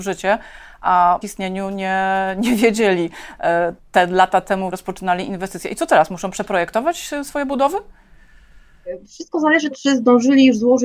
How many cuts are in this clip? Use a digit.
4